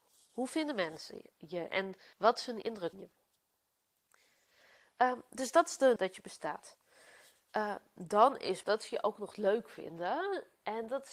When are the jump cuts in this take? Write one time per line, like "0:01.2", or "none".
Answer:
0:02.1
0:02.6
0:02.9
0:06.0
0:08.6